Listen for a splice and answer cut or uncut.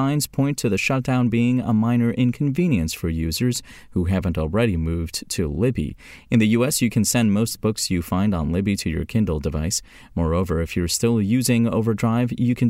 uncut